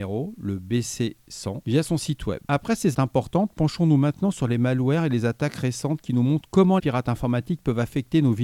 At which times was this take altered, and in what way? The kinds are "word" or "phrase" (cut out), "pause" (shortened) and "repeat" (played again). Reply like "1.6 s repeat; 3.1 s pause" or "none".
2.9 s word; 6.8 s word